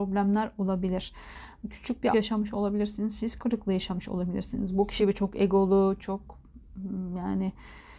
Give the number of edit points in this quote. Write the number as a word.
three